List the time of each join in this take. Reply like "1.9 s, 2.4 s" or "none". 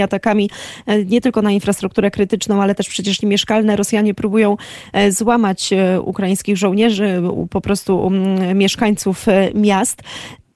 3.2 s

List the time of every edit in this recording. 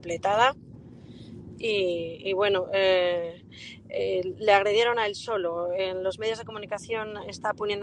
none

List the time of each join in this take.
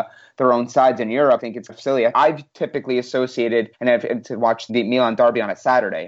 1.4 s, 1.7 s, 2.1 s, 3.7 s, 4.2 s, 4.7 s

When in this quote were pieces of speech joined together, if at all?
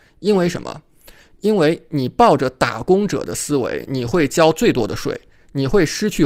none

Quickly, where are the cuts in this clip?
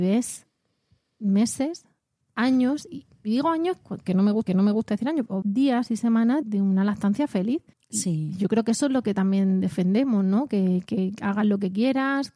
2.9 s, 4.5 s, 5.4 s, 6.4 s, 7.7 s

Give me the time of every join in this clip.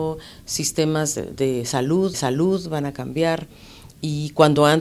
2.1 s

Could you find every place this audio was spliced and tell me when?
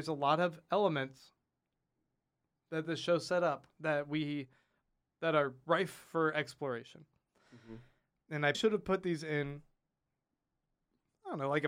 8.5 s

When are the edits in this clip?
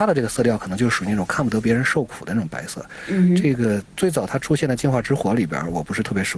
3.9 s

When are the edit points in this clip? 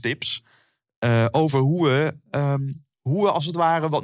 2.9 s

